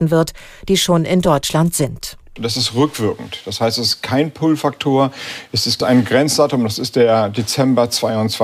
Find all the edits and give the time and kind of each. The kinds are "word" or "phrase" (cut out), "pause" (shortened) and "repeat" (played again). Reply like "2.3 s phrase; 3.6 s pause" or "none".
none